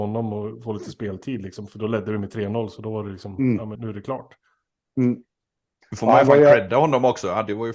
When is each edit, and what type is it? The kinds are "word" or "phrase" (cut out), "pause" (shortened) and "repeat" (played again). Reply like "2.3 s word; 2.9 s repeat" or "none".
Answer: 3.7 s word